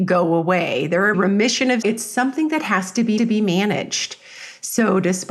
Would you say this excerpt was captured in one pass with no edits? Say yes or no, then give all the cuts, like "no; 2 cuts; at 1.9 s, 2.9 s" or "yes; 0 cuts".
no; 3 cuts; at 1.1 s, 1.8 s, 3.2 s